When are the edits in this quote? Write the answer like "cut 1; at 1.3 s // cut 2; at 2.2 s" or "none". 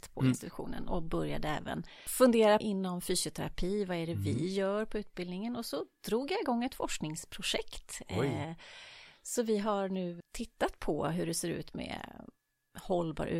cut 1; at 2.6 s // cut 2; at 10.2 s